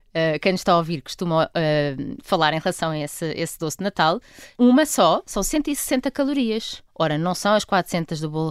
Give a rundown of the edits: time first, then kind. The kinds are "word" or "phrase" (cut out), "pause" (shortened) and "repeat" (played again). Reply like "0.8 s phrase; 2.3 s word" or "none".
4.5 s pause; 6.9 s pause